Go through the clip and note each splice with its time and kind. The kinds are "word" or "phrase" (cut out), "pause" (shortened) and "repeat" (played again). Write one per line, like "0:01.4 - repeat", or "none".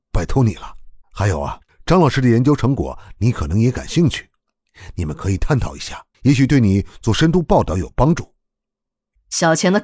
0:01.0 - pause
0:01.7 - pause
0:06.1 - pause